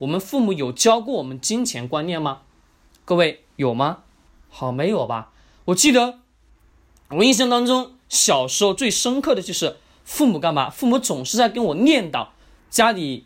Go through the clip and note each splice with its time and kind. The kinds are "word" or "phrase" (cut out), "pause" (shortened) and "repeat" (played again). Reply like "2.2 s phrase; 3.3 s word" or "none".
none